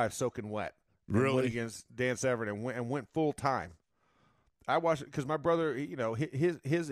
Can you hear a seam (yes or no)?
no